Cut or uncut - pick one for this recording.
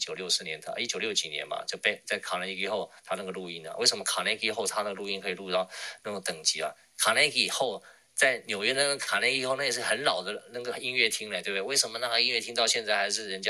uncut